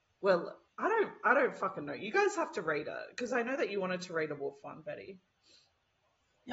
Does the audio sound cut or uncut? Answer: uncut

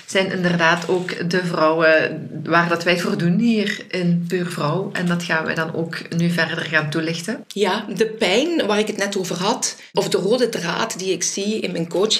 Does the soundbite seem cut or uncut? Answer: uncut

